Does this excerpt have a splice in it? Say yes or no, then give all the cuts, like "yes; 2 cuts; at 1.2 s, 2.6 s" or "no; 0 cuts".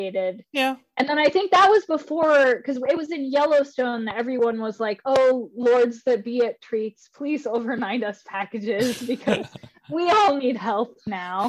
no; 0 cuts